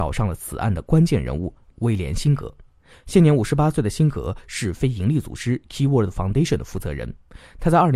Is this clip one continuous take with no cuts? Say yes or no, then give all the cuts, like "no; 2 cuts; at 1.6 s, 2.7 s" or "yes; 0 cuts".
yes; 0 cuts